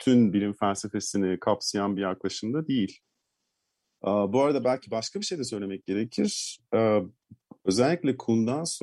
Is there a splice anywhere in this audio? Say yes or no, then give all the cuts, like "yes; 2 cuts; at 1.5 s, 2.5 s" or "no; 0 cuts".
no; 0 cuts